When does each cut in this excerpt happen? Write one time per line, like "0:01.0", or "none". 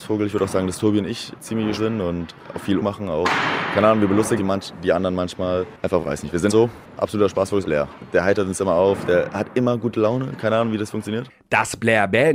0:01.8
0:02.8
0:04.4
0:06.0
0:06.5
0:07.6